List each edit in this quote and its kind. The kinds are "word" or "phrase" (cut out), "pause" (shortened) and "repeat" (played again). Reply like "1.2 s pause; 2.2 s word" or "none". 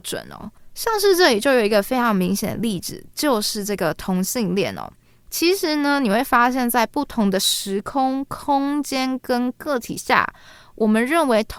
none